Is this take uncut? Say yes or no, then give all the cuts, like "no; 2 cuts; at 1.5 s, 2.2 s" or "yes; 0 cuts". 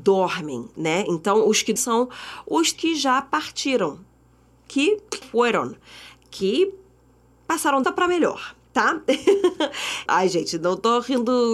no; 5 cuts; at 1.8 s, 2.7 s, 5.2 s, 7.8 s, 10.1 s